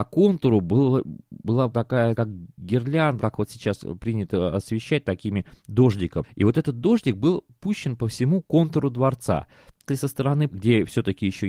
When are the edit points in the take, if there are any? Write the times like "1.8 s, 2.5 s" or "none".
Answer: 1.7 s, 2.1 s, 3.2 s, 6.2 s, 9.9 s, 10.5 s